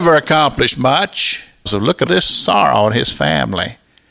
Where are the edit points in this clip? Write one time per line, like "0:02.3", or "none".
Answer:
0:01.7
0:02.1